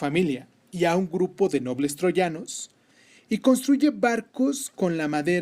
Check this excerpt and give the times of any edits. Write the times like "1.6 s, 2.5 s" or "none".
none